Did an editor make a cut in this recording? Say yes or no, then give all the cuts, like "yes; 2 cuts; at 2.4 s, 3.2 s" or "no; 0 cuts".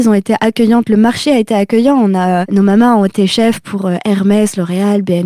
yes; 1 cut; at 2.4 s